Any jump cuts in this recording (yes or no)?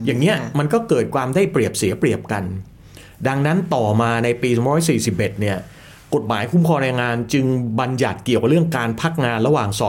no